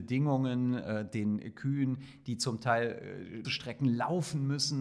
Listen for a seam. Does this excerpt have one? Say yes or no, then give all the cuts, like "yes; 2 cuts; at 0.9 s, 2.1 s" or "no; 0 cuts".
yes; 1 cut; at 3.4 s